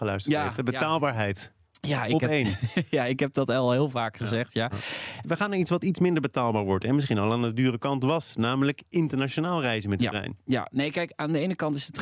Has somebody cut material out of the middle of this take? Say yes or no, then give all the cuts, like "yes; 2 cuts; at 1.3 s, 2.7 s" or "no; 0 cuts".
no; 0 cuts